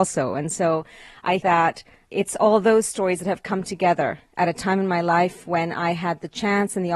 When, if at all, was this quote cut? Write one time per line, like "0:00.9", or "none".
0:01.4